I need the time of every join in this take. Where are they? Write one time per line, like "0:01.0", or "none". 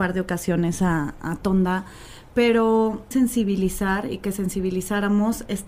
0:03.1